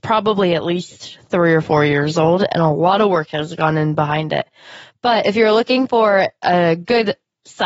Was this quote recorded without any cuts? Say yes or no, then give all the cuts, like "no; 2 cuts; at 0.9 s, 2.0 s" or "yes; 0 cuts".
yes; 0 cuts